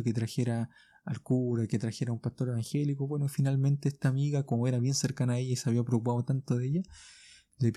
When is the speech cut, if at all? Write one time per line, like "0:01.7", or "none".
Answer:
none